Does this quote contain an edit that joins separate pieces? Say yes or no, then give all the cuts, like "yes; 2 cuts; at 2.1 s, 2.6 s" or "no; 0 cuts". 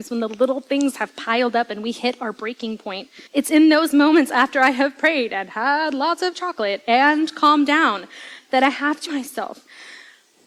yes; 2 cuts; at 3.3 s, 9.1 s